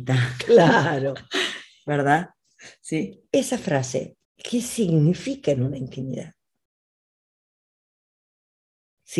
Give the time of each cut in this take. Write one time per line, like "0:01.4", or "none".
0:04.2